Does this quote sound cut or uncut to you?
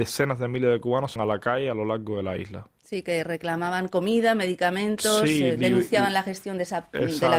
cut